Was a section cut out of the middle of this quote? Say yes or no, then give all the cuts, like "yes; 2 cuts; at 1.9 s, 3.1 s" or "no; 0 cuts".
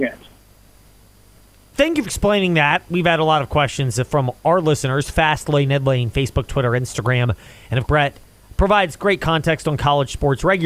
yes; 2 cuts; at 2.0 s, 7.8 s